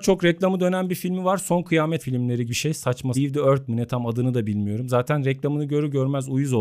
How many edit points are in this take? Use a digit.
4